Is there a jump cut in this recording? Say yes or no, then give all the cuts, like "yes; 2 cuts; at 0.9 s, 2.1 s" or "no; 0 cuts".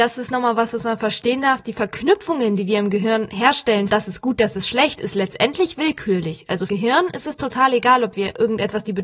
yes; 2 cuts; at 3.9 s, 6.7 s